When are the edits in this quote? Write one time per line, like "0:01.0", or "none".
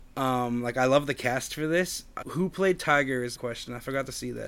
0:02.2
0:03.4